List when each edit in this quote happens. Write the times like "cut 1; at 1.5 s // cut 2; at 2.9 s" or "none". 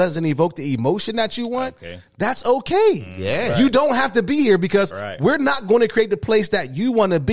none

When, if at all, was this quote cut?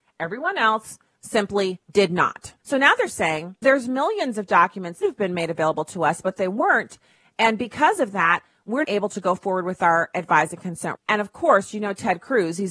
cut 1; at 1.8 s // cut 2; at 2.6 s // cut 3; at 3.6 s // cut 4; at 5.0 s // cut 5; at 8.8 s // cut 6; at 10.9 s

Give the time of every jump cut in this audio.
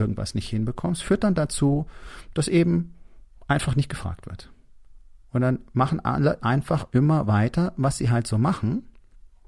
none

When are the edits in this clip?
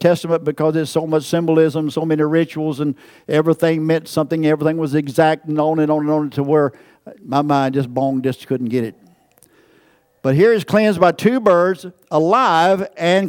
none

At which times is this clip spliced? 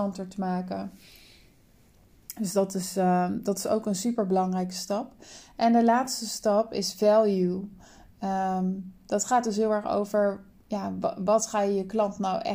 none

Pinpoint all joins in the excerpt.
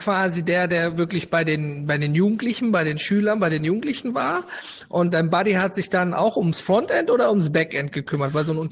cut 1; at 5.1 s

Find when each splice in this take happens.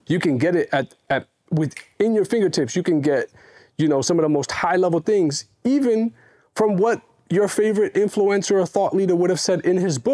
none

